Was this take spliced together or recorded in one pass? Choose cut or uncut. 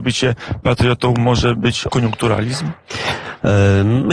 cut